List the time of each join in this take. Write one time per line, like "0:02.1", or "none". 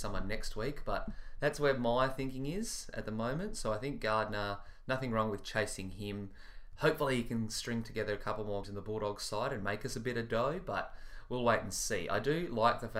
0:08.6